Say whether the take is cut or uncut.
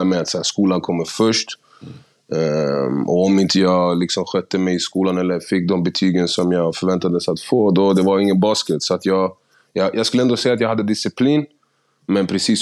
uncut